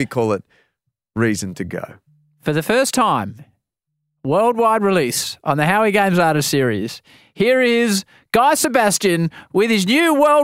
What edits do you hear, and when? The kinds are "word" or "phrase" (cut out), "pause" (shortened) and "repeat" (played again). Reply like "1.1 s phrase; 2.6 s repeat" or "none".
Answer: none